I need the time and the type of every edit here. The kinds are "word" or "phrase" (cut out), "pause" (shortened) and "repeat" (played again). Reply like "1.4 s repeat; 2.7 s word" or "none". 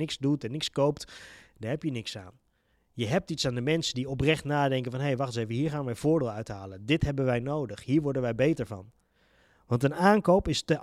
none